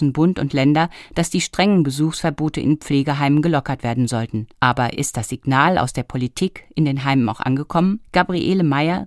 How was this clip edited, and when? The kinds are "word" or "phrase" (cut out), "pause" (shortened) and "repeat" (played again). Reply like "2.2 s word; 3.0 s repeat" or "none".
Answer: 4.5 s pause; 8.0 s pause